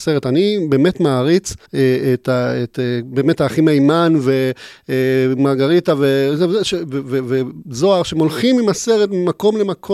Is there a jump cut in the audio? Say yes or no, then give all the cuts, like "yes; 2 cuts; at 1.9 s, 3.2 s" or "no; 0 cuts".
yes; 1 cut; at 1.7 s